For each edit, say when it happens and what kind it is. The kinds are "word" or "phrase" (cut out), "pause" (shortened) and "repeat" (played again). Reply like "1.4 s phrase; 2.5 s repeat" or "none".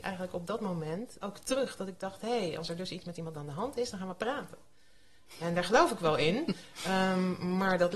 1.2 s word